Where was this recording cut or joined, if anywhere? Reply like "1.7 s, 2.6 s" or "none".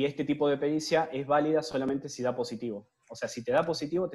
none